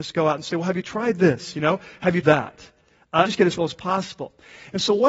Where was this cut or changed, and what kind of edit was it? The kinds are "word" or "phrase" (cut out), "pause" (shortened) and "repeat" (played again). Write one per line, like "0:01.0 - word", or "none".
0:02.2 - word
0:03.3 - word
0:03.6 - word